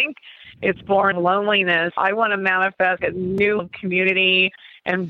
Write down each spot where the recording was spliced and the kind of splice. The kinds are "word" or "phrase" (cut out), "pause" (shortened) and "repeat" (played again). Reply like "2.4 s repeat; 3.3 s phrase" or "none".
1.1 s word; 2.0 s word; 3.0 s word; 3.6 s word